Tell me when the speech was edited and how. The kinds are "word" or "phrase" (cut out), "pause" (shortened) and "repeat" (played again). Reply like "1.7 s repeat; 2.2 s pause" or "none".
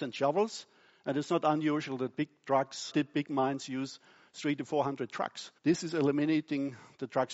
2.9 s word; 5.6 s pause